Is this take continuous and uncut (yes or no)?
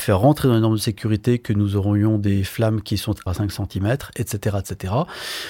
no